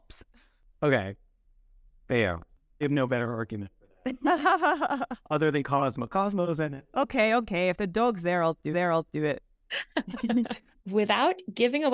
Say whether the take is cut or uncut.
cut